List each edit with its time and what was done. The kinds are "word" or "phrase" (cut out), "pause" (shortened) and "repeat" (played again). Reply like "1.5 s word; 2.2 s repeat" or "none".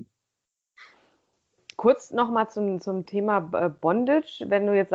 none